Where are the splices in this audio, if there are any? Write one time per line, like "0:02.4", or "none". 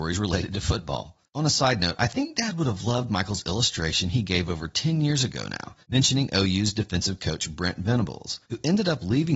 0:01.3
0:05.8
0:08.4